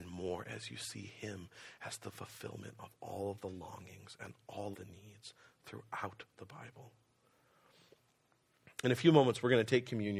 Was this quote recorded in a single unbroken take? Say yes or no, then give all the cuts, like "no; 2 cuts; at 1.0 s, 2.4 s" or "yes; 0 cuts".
no; 1 cut; at 4.7 s